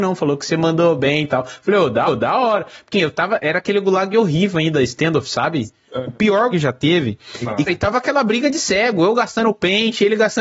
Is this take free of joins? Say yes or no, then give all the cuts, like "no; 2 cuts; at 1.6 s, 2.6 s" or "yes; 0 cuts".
no; 4 cuts; at 2.1 s, 2.9 s, 6.5 s, 7.7 s